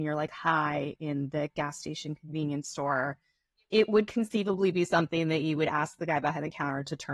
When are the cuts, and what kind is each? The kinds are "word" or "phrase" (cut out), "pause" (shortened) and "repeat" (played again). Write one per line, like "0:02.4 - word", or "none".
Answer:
none